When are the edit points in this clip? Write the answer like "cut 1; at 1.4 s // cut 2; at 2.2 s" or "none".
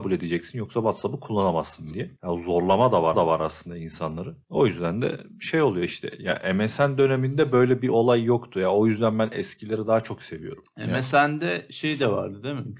cut 1; at 3.1 s